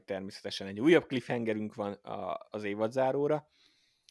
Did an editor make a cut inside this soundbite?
no; 0 cuts

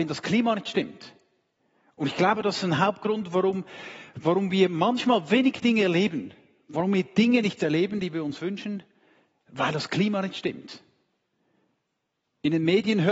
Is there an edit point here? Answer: no; 0 cuts

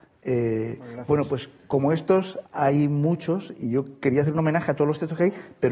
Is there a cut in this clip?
yes; 1 cut; at 2.5 s

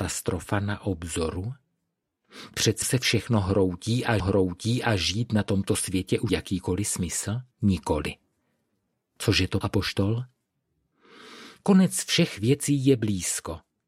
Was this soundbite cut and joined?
yes; 5 cuts; at 2.8 s, 4.2 s, 6.3 s, 7.5 s, 9.6 s

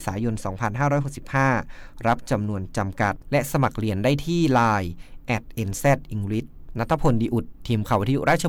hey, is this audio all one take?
yes; 0 cuts

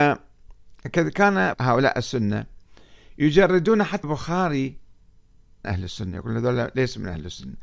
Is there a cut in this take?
yes; 3 cuts; at 1.5 s, 4.0 s, 5.6 s

